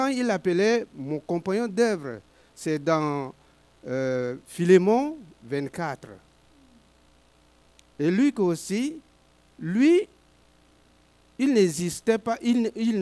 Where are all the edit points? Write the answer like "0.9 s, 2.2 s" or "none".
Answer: none